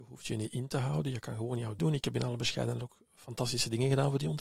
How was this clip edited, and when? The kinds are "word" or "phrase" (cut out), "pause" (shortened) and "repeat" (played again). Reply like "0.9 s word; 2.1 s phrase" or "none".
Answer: 1.8 s word